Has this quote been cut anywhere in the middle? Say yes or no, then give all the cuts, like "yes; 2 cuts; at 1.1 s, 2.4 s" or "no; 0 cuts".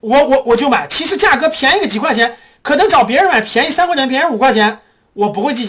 no; 0 cuts